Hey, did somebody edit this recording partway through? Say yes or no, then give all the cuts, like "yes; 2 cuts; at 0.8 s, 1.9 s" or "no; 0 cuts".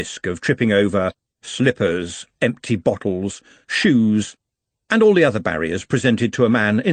no; 0 cuts